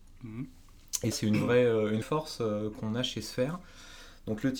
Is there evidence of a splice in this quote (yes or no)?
yes